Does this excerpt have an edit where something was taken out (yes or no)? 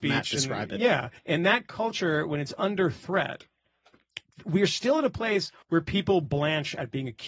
yes